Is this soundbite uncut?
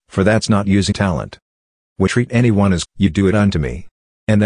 no; 3 cuts; at 0.9 s, 2.1 s, 2.9 s

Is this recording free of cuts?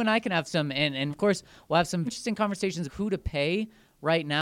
no; 3 cuts; at 1.1 s, 2.1 s, 2.9 s

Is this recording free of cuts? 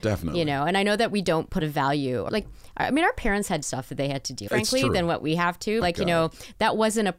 no; 5 cuts; at 1.6 s, 2.3 s, 3.6 s, 4.5 s, 5.8 s

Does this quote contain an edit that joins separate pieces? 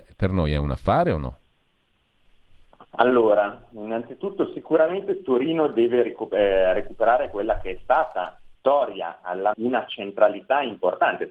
yes; 2 cuts; at 8.5 s, 9.5 s

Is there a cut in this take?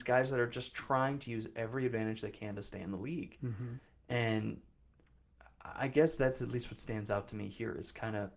no; 0 cuts

